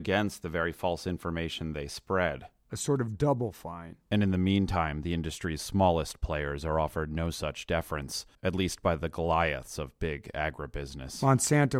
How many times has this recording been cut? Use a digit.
2